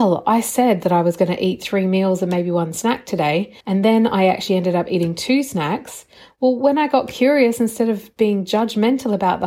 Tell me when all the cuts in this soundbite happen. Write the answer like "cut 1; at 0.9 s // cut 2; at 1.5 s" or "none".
cut 1; at 3.6 s